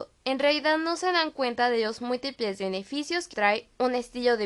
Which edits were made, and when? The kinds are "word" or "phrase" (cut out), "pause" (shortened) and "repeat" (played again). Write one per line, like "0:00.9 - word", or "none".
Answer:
0:03.3 - word

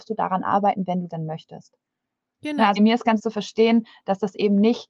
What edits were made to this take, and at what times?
0:01.1 - word
0:02.8 - word
0:03.2 - word

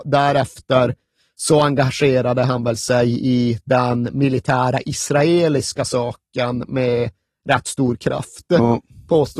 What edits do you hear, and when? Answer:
none

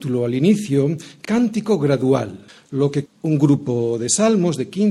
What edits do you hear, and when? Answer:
0:01.2 - word
0:02.5 - pause
0:03.1 - word

